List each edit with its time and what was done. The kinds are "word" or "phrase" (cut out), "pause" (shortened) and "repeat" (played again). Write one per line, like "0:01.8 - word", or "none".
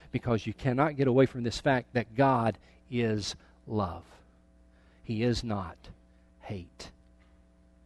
none